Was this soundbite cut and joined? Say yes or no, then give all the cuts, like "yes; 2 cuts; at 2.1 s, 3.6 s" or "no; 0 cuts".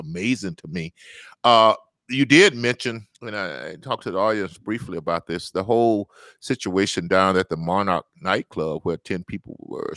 yes; 1 cut; at 3.1 s